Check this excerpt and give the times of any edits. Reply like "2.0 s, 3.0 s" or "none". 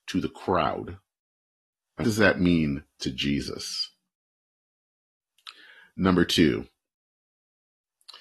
2.0 s